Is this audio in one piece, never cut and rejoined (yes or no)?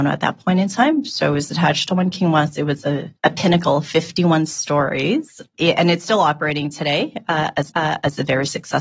no